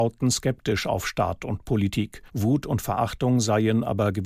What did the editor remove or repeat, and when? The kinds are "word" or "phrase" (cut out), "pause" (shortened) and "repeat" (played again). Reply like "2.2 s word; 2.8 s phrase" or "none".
2.3 s pause